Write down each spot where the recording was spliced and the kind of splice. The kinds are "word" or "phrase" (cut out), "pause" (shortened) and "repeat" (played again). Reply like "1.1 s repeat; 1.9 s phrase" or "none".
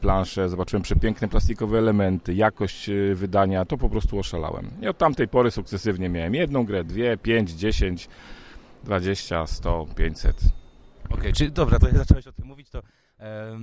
none